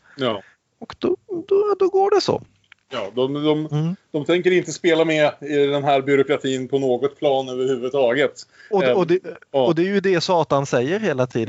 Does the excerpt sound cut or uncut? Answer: uncut